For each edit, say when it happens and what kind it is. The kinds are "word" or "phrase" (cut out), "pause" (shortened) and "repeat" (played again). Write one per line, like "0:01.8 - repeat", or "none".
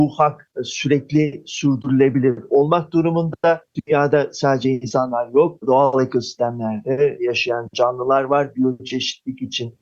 none